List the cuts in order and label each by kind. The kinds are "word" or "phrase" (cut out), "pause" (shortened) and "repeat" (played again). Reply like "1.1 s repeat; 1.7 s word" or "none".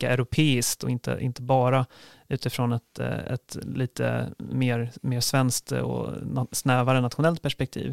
none